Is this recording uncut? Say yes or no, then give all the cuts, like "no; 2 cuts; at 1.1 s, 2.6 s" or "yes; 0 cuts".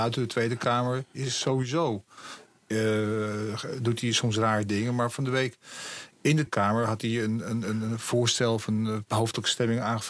no; 1 cut; at 6.5 s